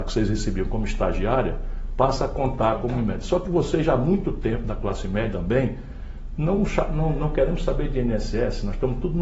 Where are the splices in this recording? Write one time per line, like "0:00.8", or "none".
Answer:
0:05.3